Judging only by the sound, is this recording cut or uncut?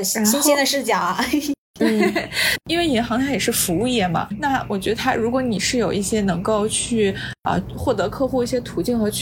uncut